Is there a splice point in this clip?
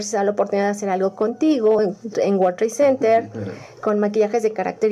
no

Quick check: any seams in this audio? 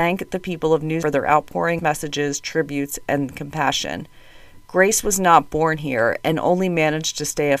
yes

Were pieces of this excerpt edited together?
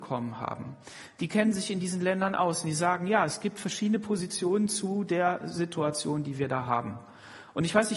no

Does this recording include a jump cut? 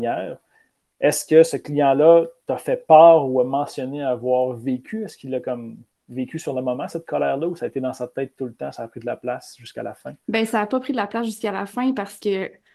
yes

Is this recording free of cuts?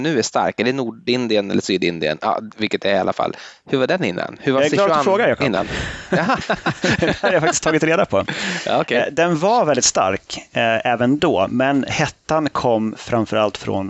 yes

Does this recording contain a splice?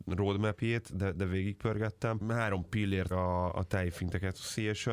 yes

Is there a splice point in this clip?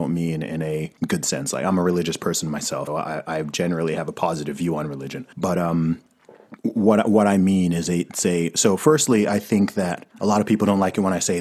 yes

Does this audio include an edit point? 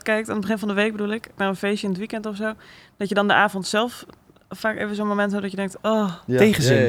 yes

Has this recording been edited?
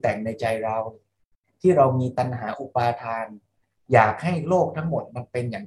no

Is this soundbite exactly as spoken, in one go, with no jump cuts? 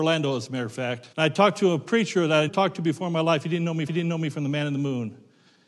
no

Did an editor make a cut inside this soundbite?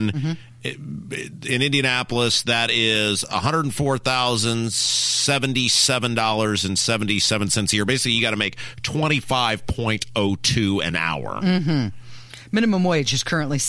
no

